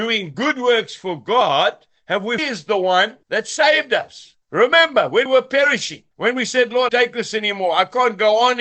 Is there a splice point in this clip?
yes; 6 cuts; at 2.4 s, 3.2 s, 4.4 s, 5.3 s, 6.1 s, 6.9 s

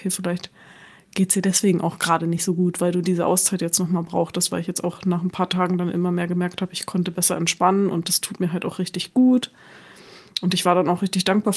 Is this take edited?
no; 0 cuts

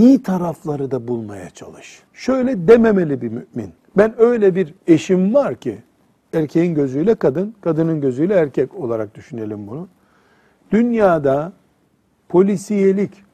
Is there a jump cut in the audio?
yes; 3 cuts; at 2.1 s, 3.8 s, 4.8 s

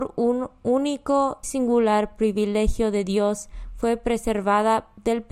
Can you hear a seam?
yes; 1 cut; at 1.4 s

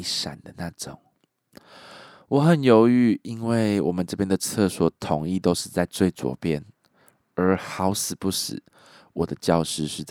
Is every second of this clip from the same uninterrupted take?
yes; 0 cuts

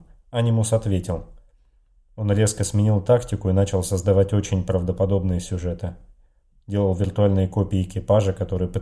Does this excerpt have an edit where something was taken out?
no; 0 cuts

